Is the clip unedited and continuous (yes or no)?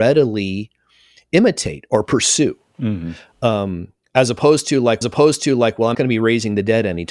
no